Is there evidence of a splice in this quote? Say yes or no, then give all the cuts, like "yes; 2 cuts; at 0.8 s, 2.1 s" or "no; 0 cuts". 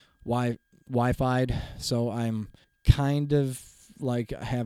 yes; 1 cut; at 2.6 s